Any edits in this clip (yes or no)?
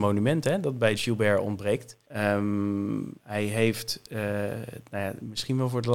yes